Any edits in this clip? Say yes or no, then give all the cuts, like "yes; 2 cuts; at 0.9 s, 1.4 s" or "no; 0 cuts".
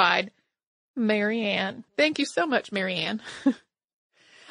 yes; 1 cut; at 1.9 s